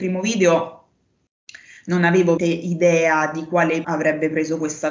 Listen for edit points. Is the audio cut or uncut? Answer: cut